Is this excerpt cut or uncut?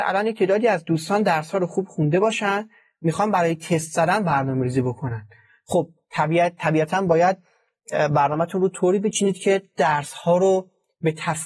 uncut